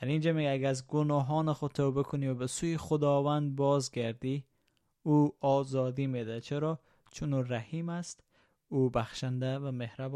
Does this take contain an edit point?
no; 0 cuts

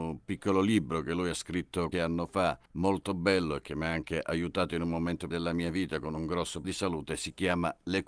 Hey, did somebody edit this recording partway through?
yes; 4 cuts; at 1.9 s, 2.7 s, 5.3 s, 6.6 s

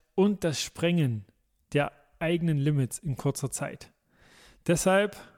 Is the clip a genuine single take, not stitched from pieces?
yes; 0 cuts

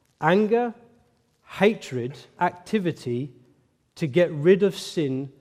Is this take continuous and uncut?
no; 1 cut; at 2.4 s

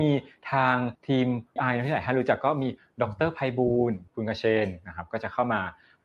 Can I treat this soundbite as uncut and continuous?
no; 3 cuts; at 0.9 s, 1.6 s, 4.1 s

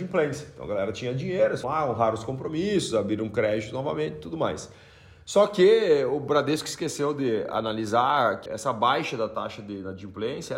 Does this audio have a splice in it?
yes; 2 cuts; at 1.6 s, 8.5 s

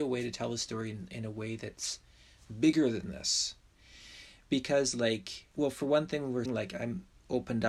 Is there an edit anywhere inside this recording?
yes; 2 cuts; at 5.5 s, 6.5 s

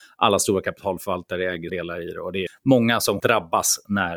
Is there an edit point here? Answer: yes; 3 cuts; at 1.7 s, 2.5 s, 3.2 s

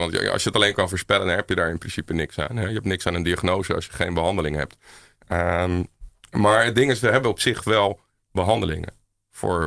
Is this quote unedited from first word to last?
yes; 0 cuts

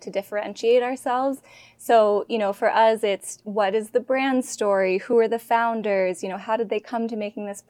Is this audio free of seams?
yes; 0 cuts

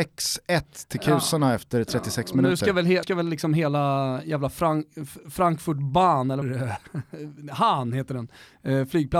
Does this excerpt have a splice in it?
yes; 2 cuts; at 3.0 s, 6.4 s

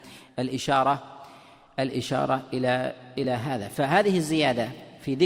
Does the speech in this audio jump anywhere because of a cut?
no; 0 cuts

